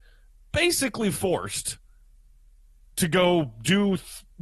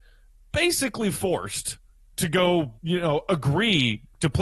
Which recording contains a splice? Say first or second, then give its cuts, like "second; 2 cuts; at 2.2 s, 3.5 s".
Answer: second; 2 cuts; at 1.9 s, 2.8 s